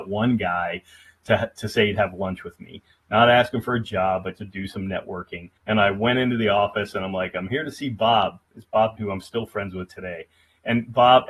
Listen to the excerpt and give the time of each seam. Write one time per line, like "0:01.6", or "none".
0:04.3
0:05.6
0:09.0